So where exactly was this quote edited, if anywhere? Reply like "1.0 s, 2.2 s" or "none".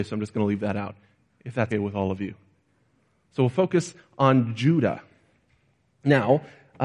1.7 s